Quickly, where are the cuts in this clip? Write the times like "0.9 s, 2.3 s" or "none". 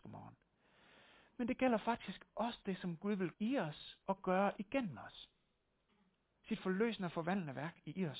3.3 s, 4.0 s, 5.9 s